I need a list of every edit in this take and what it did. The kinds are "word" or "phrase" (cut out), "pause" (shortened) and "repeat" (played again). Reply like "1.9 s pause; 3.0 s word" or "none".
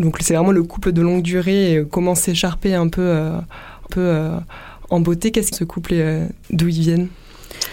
3.9 s repeat; 5.5 s phrase; 6.4 s pause